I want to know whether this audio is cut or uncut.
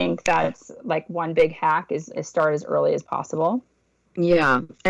uncut